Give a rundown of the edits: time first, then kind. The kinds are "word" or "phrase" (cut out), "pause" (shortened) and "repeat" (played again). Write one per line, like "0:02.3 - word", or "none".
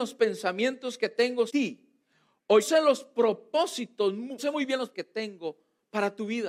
0:01.5 - word
0:02.6 - word
0:04.4 - word
0:04.9 - word